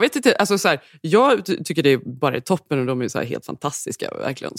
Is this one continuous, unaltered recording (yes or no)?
yes